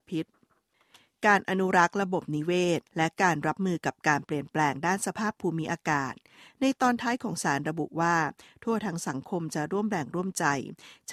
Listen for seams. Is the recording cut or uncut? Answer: cut